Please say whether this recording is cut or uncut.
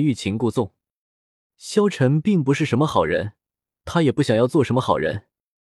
uncut